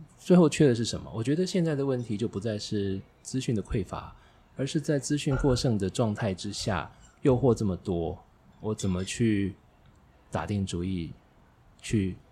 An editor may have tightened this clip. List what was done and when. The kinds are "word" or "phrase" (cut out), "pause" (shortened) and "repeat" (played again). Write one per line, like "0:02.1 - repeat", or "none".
none